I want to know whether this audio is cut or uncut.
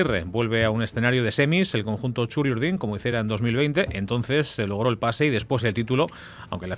uncut